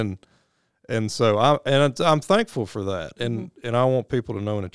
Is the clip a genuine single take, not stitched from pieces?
yes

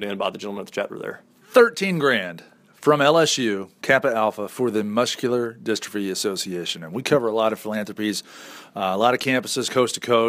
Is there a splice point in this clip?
no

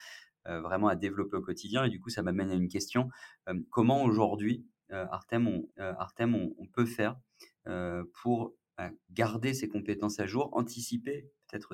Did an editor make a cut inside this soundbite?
yes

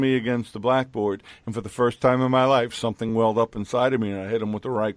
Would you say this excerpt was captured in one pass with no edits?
yes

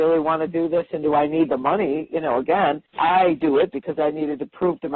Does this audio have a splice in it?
yes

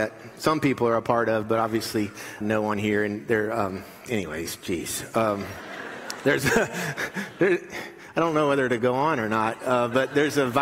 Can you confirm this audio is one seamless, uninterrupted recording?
no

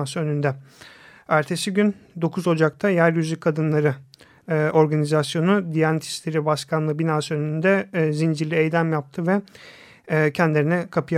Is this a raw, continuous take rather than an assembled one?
yes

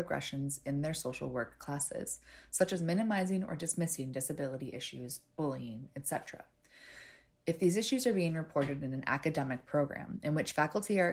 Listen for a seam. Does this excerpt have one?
no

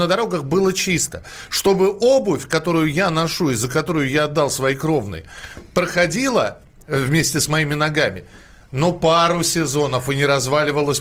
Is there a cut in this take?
no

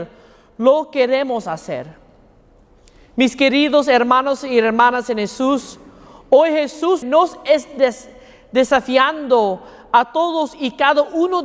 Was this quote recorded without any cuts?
no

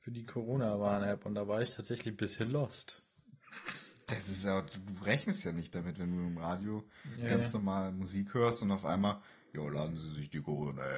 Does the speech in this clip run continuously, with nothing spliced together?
yes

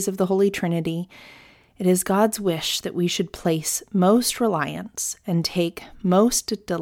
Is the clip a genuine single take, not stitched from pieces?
yes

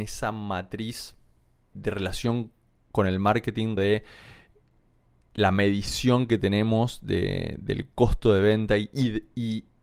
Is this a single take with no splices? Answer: no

